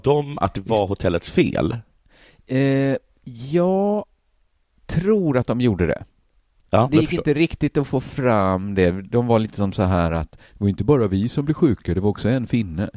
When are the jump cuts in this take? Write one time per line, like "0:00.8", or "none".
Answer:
0:06.9